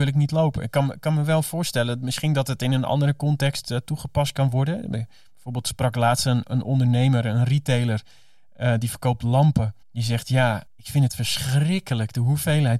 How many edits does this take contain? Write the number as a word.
two